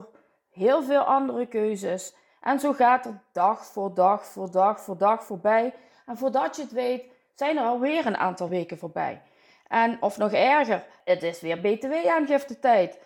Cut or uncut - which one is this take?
uncut